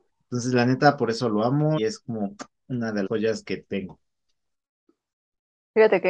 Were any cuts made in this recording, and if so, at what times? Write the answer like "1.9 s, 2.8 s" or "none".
1.8 s, 3.1 s